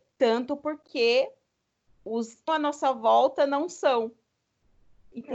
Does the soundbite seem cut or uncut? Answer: cut